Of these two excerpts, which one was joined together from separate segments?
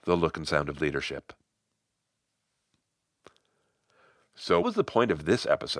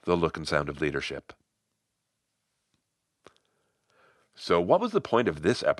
first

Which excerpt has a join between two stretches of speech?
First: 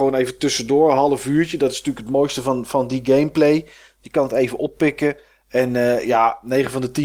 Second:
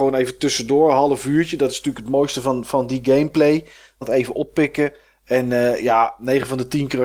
second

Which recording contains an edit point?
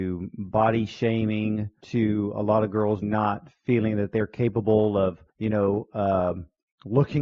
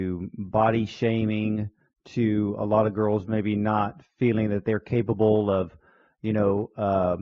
first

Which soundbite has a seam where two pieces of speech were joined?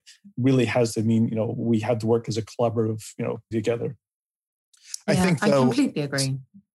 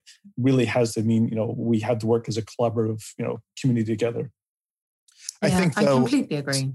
first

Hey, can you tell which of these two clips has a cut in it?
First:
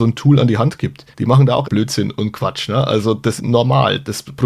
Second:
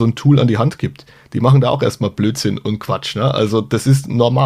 first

